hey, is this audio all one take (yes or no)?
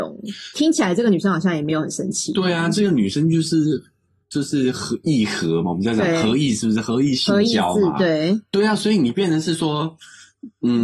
yes